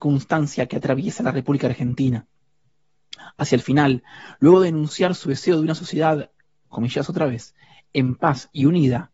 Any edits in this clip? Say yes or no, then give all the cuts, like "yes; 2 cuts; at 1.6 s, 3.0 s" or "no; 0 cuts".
no; 0 cuts